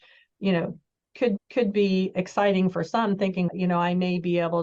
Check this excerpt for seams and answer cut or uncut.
cut